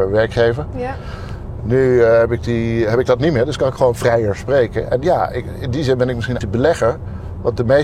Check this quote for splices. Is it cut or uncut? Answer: cut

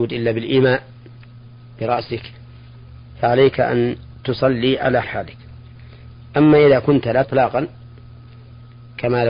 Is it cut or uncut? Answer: cut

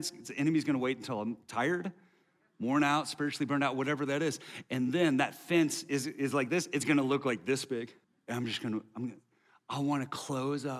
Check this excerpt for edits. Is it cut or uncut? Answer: cut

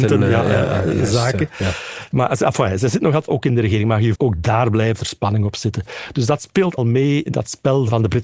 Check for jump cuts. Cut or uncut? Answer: cut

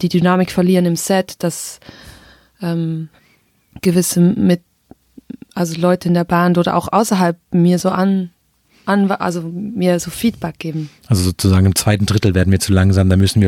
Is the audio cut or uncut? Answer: uncut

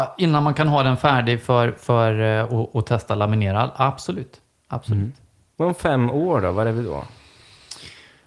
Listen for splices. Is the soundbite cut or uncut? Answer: uncut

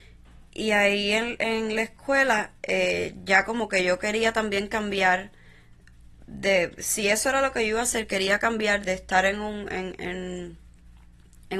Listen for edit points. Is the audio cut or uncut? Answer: cut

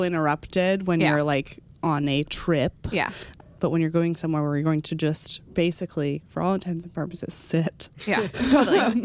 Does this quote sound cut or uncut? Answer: uncut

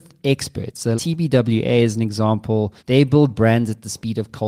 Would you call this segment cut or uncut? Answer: cut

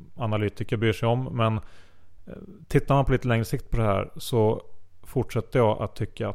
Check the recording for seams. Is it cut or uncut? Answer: uncut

